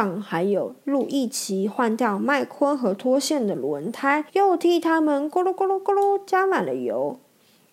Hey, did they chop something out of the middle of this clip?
yes; 1 cut; at 4.3 s

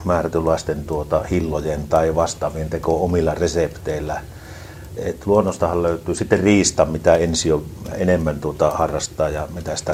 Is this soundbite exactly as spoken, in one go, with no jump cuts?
no; 2 cuts; at 5.0 s, 7.9 s

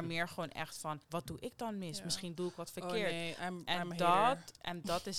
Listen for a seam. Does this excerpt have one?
yes; 1 cut; at 1.0 s

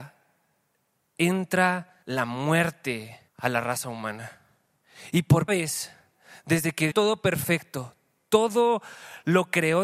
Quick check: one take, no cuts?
no; 4 cuts; at 2.0 s, 3.3 s, 5.5 s, 6.9 s

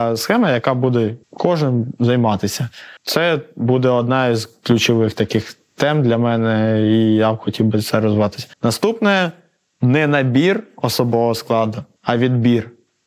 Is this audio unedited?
no; 4 cuts; at 1.2 s, 3.0 s, 8.5 s, 12.0 s

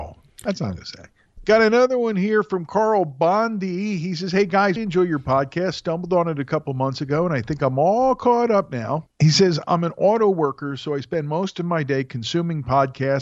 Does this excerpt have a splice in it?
yes; 1 cut; at 4.8 s

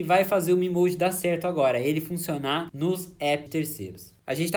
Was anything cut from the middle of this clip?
yes; 1 cut; at 3.5 s

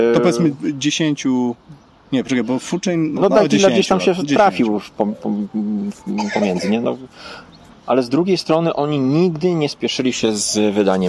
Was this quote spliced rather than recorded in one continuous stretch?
yes; 2 cuts; at 3.2 s, 7.7 s

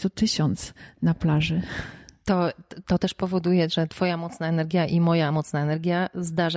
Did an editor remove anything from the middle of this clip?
no; 0 cuts

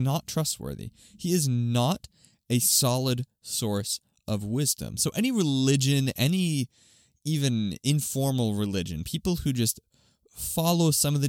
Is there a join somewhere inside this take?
no; 0 cuts

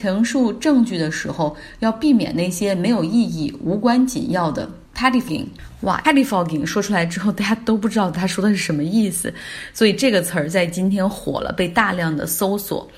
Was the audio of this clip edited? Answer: yes; 2 cuts; at 5.3 s, 6.0 s

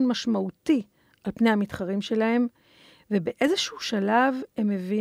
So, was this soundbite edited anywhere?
no; 0 cuts

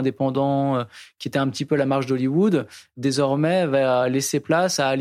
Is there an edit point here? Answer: no; 0 cuts

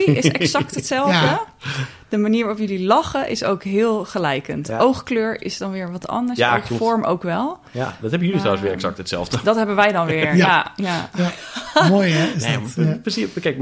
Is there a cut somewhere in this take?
no; 0 cuts

